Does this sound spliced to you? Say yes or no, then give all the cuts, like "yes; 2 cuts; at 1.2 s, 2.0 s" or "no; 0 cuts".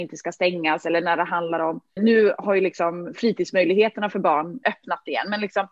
yes; 2 cuts; at 2.0 s, 4.6 s